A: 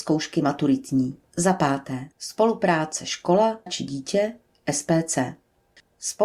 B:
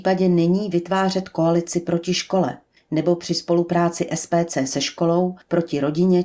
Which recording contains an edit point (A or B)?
A